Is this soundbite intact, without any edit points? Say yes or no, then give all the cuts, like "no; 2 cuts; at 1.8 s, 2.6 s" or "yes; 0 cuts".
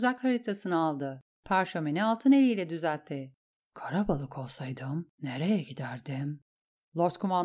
yes; 0 cuts